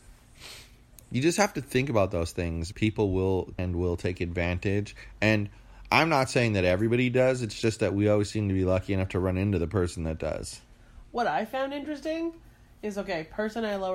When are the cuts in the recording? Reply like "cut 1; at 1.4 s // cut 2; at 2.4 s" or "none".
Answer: cut 1; at 2.7 s // cut 2; at 3.6 s